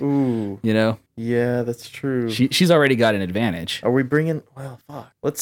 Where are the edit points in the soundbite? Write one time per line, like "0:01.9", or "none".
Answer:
none